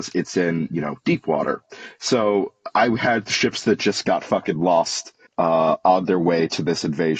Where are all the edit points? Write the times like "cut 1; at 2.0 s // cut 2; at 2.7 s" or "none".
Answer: cut 1; at 5.3 s